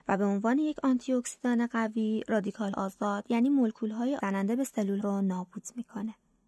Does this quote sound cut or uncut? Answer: cut